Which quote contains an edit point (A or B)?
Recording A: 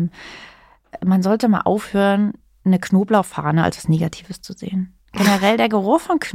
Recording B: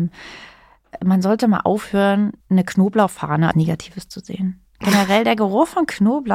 B